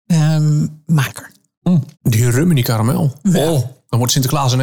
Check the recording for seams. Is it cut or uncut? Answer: cut